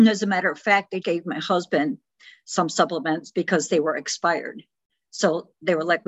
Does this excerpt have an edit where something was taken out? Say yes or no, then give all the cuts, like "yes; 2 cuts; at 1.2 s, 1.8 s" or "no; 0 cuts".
yes; 1 cut; at 1.0 s